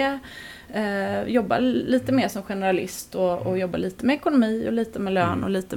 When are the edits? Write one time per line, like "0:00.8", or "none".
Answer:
none